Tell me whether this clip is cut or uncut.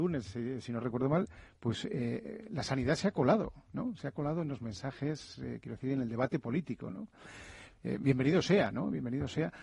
uncut